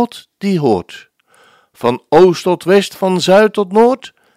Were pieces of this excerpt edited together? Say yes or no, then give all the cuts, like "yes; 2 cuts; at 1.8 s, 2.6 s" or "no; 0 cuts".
no; 0 cuts